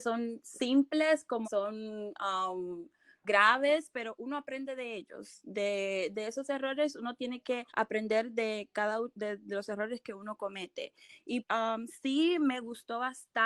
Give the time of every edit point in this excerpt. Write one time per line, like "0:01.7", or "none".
0:01.4
0:03.2
0:07.7
0:11.4